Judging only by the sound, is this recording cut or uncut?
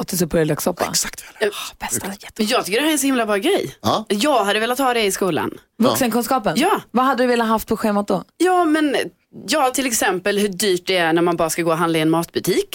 uncut